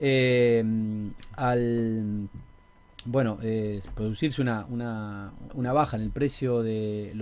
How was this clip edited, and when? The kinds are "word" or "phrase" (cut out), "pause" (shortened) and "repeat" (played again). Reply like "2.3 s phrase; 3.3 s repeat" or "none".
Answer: 5.5 s word

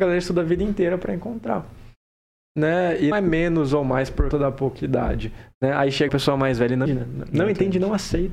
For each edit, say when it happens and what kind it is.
3.1 s word; 4.3 s word; 6.1 s word; 6.9 s word

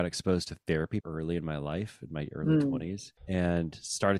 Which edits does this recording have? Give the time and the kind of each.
1.0 s word; 3.2 s pause

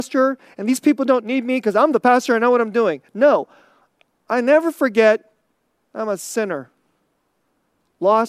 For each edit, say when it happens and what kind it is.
none

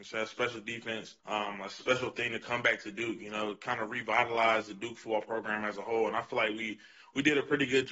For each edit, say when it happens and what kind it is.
1.2 s pause

